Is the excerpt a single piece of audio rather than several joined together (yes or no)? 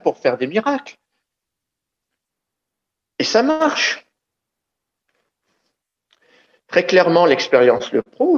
yes